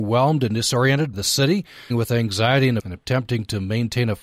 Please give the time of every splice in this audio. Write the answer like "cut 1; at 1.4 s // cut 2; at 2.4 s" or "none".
cut 1; at 1.1 s // cut 2; at 1.9 s // cut 3; at 2.8 s